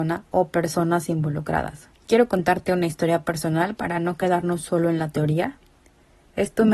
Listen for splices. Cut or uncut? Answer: cut